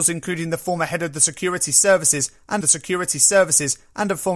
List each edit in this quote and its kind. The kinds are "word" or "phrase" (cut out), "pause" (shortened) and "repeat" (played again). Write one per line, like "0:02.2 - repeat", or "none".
0:02.6 - repeat